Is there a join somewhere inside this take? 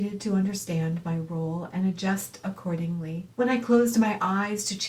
yes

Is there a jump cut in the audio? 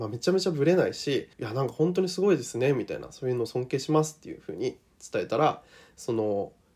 yes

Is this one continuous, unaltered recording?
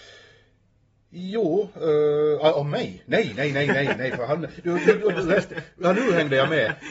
yes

